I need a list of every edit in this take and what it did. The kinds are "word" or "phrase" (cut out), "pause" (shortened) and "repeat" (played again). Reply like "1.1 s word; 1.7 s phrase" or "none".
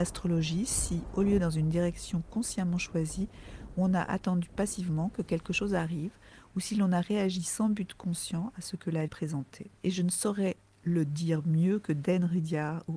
1.4 s phrase; 9.1 s word; 9.8 s pause